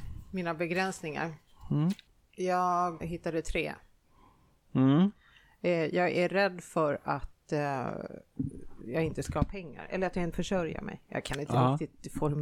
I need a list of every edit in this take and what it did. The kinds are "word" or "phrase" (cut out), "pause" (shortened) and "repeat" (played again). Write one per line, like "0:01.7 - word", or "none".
0:03.0 - word
0:10.3 - word